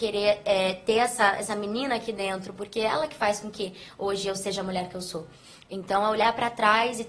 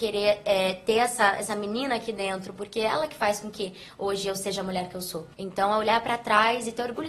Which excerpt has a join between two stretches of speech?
second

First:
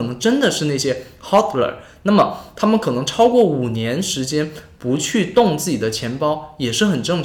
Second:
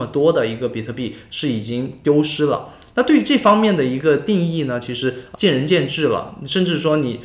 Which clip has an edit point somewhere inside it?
second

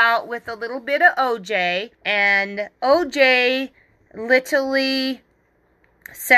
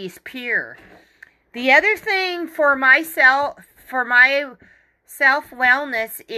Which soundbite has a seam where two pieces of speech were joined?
first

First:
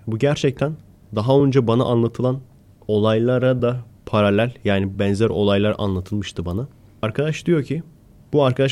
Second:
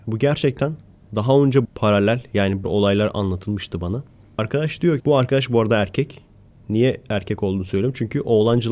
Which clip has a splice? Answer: second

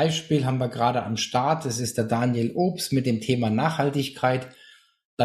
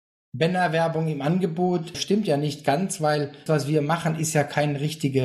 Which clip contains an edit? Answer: second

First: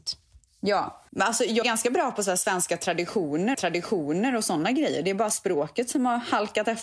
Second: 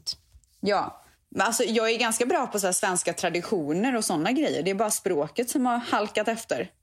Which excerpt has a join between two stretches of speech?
first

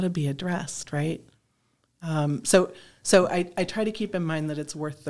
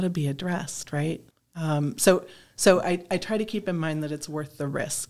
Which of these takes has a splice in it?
second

